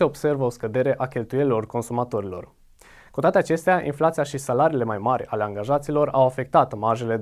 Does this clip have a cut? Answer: no; 0 cuts

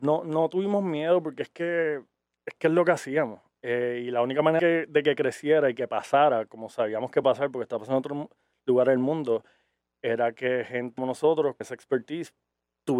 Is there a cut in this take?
yes; 4 cuts; at 4.6 s, 7.2 s, 11.0 s, 11.6 s

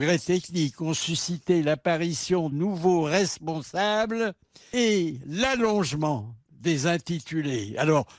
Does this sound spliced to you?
yes; 1 cut; at 2.5 s

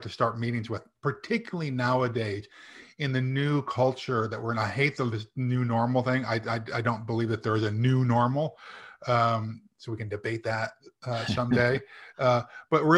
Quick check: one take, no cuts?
yes; 0 cuts

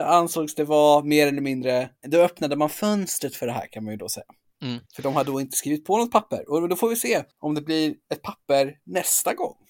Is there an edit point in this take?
yes; 3 cuts; at 2.0 s, 4.9 s, 7.3 s

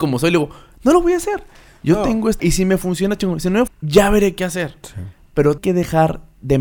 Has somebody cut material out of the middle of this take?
yes; 3 cuts; at 2.4 s, 3.7 s, 5.6 s

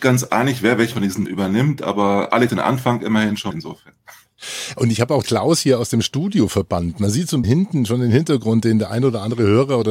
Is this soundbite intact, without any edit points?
no; 6 cuts; at 0.9 s, 1.3 s, 2.5 s, 3.5 s, 5.2 s, 7.4 s

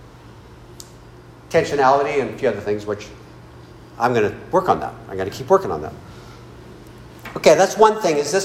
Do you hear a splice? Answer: no; 0 cuts

